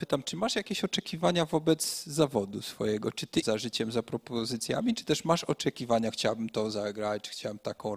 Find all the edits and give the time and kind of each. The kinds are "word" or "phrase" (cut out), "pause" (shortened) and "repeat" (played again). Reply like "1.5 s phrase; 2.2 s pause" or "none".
3.4 s phrase